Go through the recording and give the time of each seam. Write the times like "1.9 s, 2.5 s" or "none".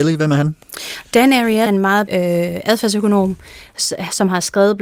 1.7 s, 2.1 s